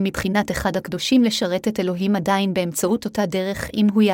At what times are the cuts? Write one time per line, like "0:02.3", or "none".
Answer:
none